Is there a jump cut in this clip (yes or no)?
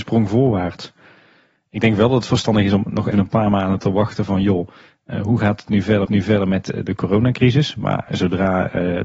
yes